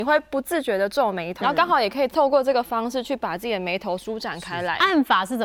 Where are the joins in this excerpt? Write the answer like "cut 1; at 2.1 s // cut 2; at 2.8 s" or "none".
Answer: cut 1; at 1.4 s